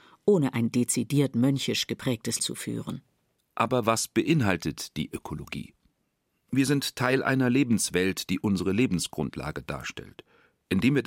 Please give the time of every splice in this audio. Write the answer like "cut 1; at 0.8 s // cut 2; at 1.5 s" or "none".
cut 1; at 2.4 s